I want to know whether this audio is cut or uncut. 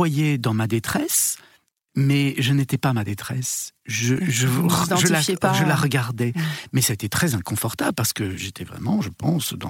uncut